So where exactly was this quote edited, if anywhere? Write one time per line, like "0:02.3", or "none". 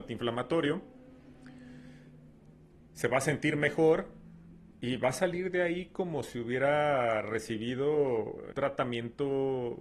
0:04.7
0:08.5